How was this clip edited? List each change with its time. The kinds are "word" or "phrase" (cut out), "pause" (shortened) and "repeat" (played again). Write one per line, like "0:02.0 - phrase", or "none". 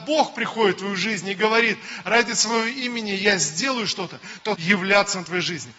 0:04.5 - phrase